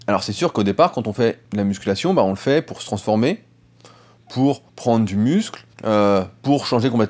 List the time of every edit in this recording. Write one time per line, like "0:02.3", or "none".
0:01.4
0:04.7
0:05.7